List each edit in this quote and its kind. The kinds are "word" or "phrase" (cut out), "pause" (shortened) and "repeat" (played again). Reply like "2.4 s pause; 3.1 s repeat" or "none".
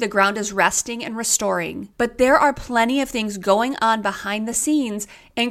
none